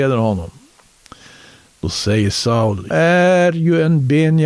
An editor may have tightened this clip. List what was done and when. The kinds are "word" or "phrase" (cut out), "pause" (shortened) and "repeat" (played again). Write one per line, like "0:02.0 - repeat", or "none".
0:02.9 - word